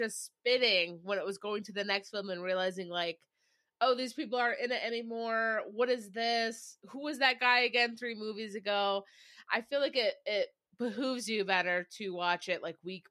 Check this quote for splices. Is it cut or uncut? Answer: uncut